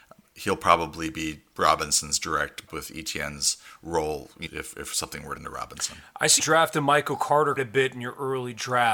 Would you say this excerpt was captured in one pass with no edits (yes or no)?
no